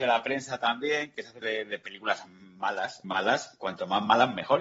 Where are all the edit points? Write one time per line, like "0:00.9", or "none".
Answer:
0:01.4
0:03.0